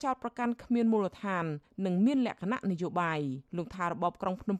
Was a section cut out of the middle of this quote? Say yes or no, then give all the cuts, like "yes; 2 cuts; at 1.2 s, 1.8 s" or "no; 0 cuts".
yes; 1 cut; at 3.5 s